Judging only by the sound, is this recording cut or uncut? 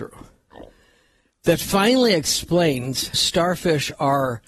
cut